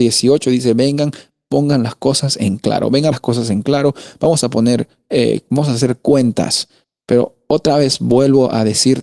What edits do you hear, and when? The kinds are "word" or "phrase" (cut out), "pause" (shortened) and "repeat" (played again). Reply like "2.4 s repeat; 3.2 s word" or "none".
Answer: 3.1 s phrase